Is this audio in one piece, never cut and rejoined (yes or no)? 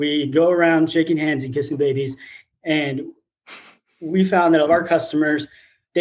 no